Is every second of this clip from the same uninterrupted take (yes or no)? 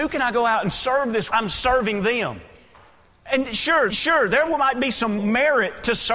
no